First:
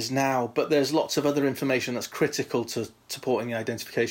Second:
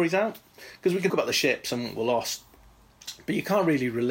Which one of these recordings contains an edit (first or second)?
second